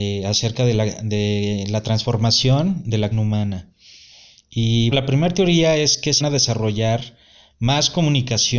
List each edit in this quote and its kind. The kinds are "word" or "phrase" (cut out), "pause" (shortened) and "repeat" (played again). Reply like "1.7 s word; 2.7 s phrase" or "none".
3.1 s word; 4.9 s word; 6.2 s word